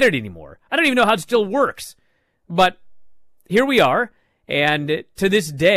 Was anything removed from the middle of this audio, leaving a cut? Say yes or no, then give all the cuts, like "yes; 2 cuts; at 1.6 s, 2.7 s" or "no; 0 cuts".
no; 0 cuts